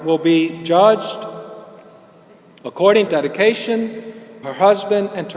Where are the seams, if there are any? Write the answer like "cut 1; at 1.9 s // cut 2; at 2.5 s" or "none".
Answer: cut 1; at 3.1 s // cut 2; at 4.4 s